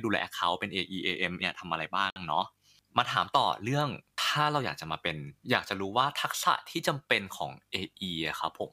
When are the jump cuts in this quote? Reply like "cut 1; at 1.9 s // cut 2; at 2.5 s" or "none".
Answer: cut 1; at 1.4 s // cut 2; at 5.4 s